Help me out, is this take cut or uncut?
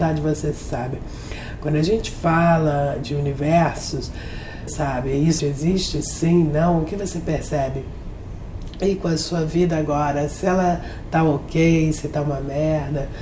cut